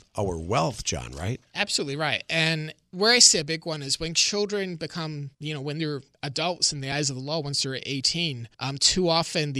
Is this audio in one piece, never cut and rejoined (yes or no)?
no